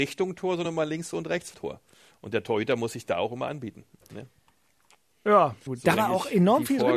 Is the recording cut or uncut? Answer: cut